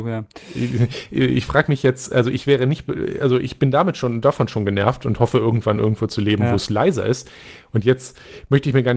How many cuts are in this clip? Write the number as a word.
zero